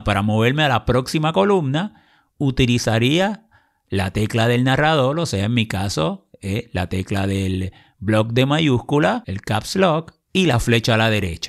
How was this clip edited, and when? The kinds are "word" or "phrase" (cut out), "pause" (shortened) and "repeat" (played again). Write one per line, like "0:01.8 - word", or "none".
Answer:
none